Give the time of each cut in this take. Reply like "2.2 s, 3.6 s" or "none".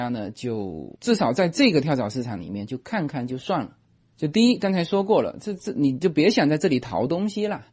1.0 s